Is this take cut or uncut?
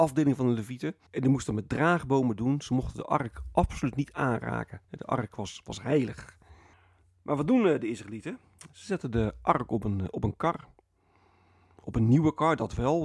cut